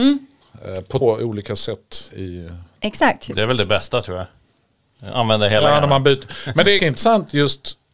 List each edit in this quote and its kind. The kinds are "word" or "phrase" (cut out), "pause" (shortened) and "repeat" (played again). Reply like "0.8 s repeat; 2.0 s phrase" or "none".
1.0 s word; 6.8 s word